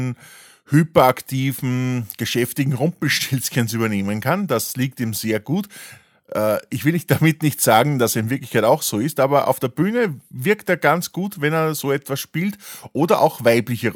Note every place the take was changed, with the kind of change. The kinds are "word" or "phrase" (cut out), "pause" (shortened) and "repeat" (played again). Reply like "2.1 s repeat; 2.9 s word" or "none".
none